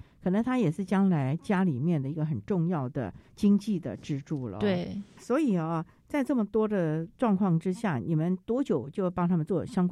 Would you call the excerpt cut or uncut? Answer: uncut